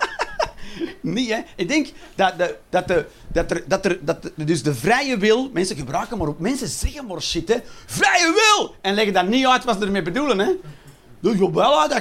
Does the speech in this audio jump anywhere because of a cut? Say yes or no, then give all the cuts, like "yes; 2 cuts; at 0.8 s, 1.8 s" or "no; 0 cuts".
no; 0 cuts